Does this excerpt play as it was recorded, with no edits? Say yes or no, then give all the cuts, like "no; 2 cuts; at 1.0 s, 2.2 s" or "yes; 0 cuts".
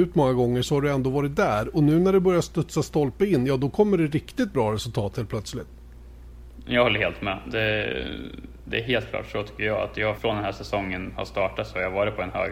no; 1 cut; at 10.2 s